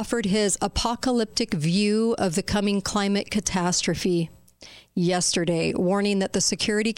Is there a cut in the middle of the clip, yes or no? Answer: no